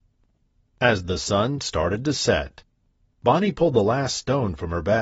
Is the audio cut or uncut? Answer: uncut